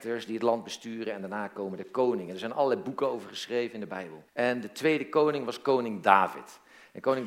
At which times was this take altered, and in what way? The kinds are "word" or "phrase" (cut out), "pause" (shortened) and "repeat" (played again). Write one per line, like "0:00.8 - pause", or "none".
0:04.3 - pause